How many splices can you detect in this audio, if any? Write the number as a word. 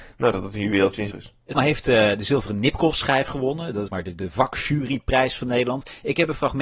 three